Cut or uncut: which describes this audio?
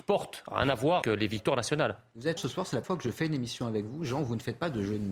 cut